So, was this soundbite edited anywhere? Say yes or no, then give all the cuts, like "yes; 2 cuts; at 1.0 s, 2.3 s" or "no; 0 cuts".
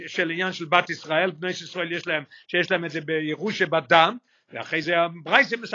no; 0 cuts